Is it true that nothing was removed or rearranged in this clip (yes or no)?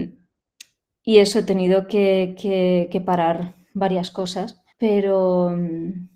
no